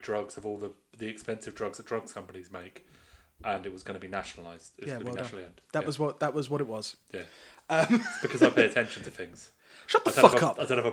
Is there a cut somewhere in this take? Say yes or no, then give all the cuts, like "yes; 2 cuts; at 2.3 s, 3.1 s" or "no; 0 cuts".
no; 0 cuts